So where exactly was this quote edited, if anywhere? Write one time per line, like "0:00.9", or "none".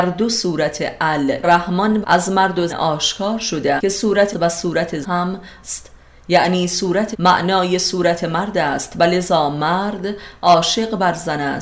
0:01.4
0:02.0
0:02.7
0:03.8
0:04.3
0:05.0
0:05.6
0:07.1